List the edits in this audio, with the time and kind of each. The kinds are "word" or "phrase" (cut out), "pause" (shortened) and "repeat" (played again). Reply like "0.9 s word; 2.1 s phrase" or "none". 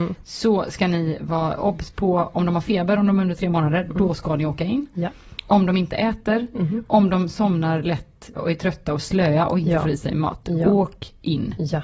8.4 s word